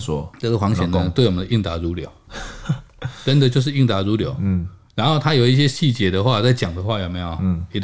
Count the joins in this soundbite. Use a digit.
0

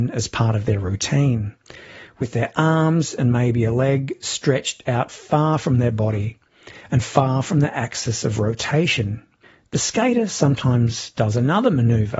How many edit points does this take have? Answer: 1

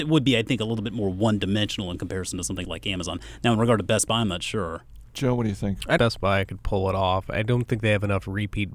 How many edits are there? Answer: 2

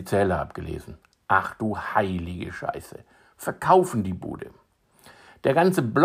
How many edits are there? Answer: 0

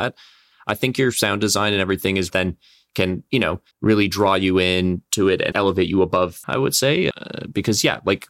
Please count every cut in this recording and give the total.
5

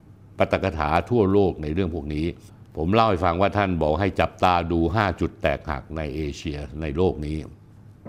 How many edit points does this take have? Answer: 1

